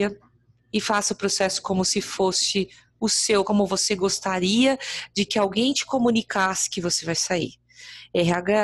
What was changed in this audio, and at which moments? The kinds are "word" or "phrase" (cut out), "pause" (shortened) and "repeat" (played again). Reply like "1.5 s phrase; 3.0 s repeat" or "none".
3.4 s word